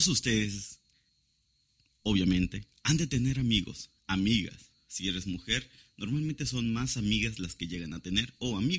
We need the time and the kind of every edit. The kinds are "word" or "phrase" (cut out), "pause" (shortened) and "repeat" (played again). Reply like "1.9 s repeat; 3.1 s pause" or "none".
4.0 s pause